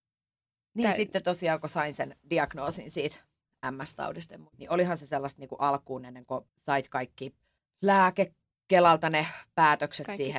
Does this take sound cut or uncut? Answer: cut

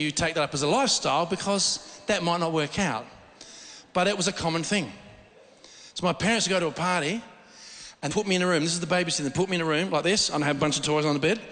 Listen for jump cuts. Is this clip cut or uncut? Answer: cut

